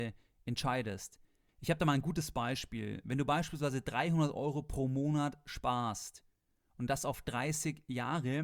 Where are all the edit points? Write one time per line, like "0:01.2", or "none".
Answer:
none